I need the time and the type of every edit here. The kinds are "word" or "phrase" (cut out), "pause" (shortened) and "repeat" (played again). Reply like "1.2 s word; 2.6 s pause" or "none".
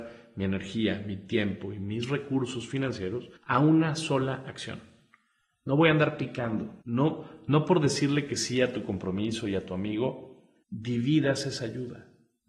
3.4 s pause; 6.8 s pause; 10.6 s pause